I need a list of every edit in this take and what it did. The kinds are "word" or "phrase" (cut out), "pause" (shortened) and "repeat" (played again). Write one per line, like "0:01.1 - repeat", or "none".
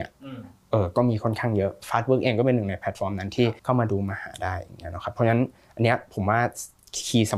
0:03.6 - pause